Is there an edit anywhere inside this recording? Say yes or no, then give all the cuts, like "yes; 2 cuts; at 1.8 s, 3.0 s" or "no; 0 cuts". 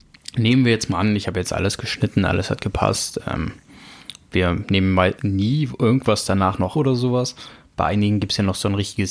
yes; 2 cuts; at 5.2 s, 6.7 s